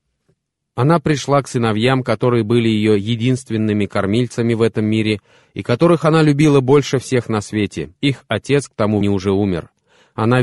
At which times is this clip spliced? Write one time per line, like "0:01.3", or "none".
0:08.0
0:09.0